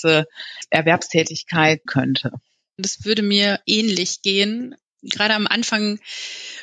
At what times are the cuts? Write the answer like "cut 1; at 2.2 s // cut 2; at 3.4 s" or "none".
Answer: cut 1; at 1.9 s